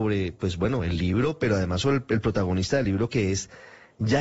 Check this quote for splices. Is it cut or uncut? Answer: uncut